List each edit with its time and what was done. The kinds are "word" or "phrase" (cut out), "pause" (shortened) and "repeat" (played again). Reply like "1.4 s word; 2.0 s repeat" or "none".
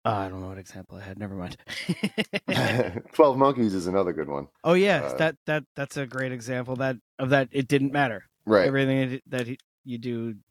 4.5 s pause; 5.7 s pause; 7.1 s pause; 8.3 s pause